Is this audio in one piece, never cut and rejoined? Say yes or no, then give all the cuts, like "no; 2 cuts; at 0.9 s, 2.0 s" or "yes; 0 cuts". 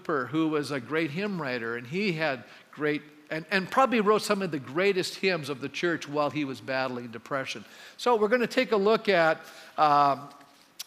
yes; 0 cuts